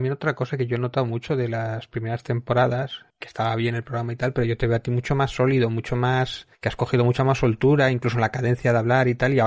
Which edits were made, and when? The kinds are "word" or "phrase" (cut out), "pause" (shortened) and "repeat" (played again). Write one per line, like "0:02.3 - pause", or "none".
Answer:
0:03.1 - pause
0:06.5 - pause